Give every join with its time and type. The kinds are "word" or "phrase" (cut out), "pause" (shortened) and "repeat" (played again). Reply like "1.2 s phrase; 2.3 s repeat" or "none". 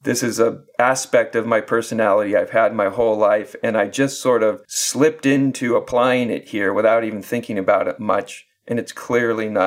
4.6 s pause